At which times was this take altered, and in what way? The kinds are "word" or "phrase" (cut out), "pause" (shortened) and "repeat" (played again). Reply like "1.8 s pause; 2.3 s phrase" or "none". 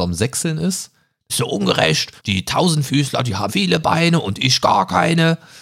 1.3 s phrase; 2.2 s pause; 3.5 s word